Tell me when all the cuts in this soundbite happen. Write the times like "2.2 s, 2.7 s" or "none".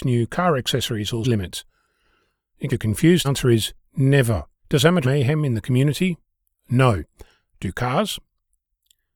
1.2 s, 2.7 s, 3.2 s, 4.6 s, 5.0 s, 6.4 s

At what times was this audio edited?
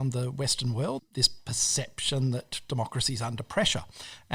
1.0 s

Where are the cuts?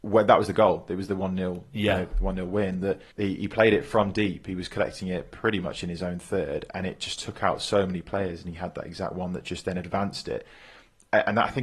3.1 s

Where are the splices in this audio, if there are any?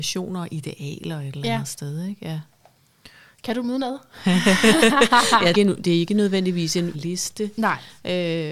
5.5 s, 6.9 s

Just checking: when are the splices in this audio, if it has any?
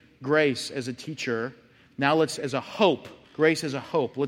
2.4 s, 3.2 s

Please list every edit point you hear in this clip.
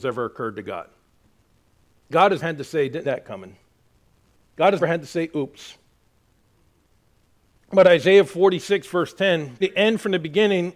2.4 s, 3.0 s, 4.8 s, 9.6 s

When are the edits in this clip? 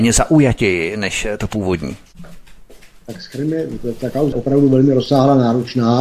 4.3 s

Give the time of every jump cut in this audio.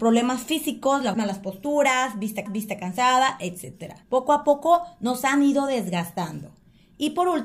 1.1 s, 2.5 s, 4.0 s

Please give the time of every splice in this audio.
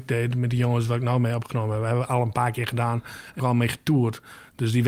3.4 s

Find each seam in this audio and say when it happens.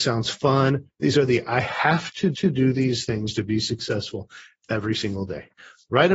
2.3 s

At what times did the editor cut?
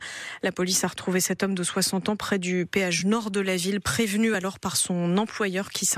none

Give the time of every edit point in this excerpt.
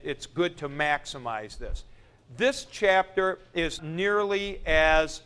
3.8 s

